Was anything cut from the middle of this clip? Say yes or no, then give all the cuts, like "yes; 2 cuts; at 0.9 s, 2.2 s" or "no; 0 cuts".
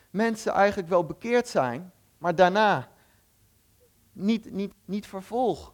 no; 0 cuts